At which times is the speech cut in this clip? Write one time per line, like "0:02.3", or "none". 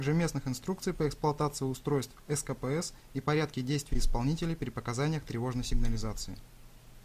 none